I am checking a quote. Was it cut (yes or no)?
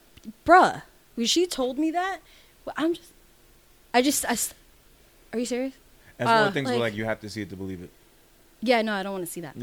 no